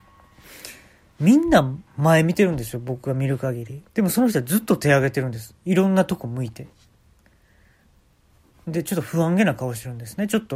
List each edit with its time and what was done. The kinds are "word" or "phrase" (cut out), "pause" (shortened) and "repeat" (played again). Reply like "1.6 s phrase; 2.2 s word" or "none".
1.9 s pause; 3.9 s pause